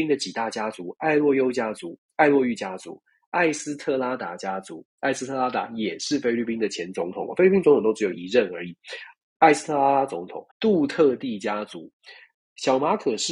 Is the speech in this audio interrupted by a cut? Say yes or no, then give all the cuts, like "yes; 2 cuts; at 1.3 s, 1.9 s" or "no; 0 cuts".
yes; 1 cut; at 10.5 s